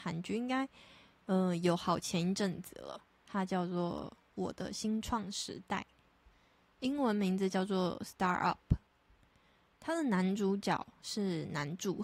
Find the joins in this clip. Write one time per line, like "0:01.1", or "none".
none